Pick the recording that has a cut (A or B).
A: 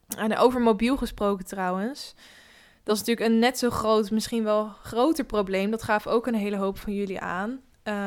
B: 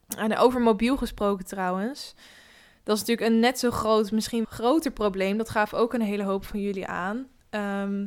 B